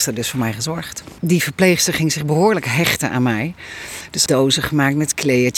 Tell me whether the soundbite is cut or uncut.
cut